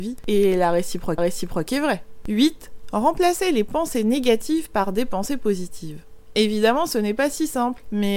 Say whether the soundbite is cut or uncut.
cut